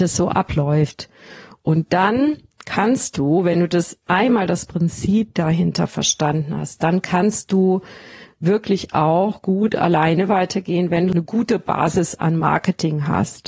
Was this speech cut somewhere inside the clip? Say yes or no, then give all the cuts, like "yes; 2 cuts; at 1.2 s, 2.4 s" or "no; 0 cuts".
no; 0 cuts